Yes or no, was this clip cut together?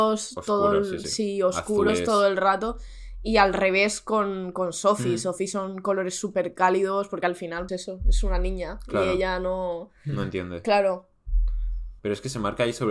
yes